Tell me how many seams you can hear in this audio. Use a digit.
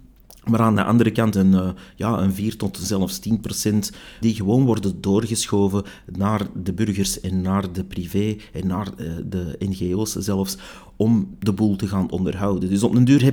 2